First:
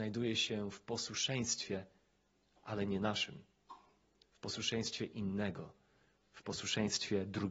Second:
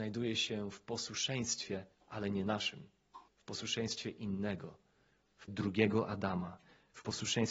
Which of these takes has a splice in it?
second; 3 cuts; at 1.9 s, 3.3 s, 5.5 s

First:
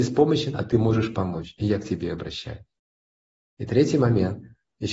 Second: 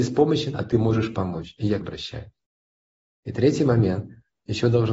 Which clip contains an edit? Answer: second; 1 cut; at 1.8 s

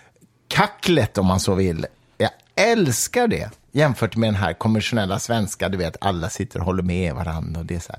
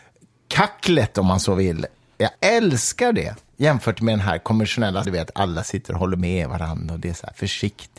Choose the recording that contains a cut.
second; 2 cuts; at 2.3 s, 5.0 s

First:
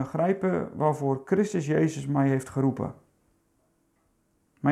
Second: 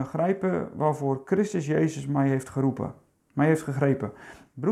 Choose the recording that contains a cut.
second; 1 cut; at 3.1 s

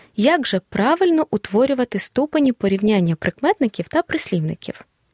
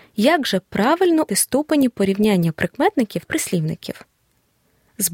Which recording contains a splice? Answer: second; 2 cuts; at 1.3 s, 3.3 s

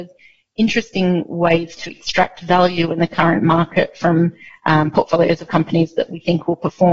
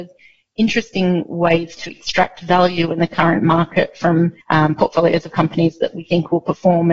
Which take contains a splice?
second; 1 cut; at 4.4 s

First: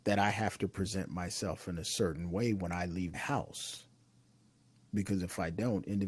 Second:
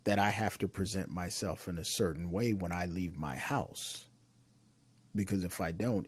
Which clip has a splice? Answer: first; 1 cut; at 3.1 s

